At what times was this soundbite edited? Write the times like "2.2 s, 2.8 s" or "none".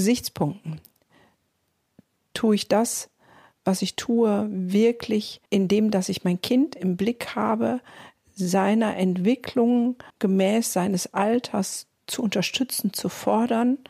5.5 s, 10.1 s